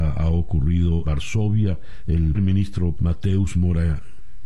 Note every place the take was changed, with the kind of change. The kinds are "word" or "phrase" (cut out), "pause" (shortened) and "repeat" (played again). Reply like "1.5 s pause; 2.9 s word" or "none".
1.0 s word; 2.3 s word; 2.9 s word

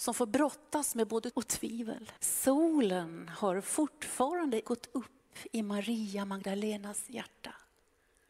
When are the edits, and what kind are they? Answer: 1.3 s word; 2.2 s pause; 4.6 s word

